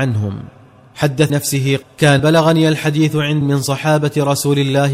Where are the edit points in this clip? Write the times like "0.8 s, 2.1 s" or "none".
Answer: 1.3 s, 1.8 s, 2.2 s, 3.4 s

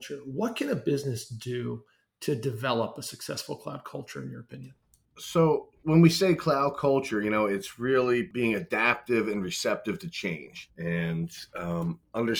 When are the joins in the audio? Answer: none

